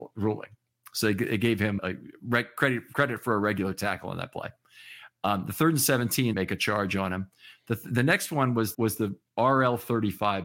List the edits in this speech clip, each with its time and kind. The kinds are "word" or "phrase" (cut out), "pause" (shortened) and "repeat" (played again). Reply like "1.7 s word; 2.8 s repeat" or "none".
1.8 s word; 6.3 s phrase; 8.7 s word